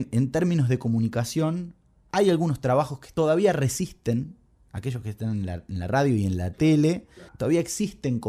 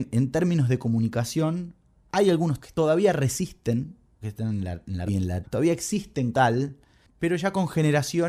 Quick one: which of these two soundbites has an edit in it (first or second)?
second